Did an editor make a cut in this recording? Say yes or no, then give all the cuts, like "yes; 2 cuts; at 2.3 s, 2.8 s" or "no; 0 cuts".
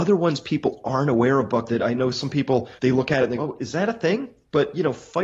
yes; 3 cuts; at 1.7 s, 2.8 s, 3.4 s